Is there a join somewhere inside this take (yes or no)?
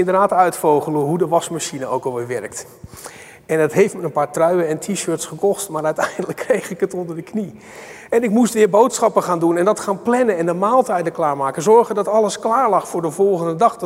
no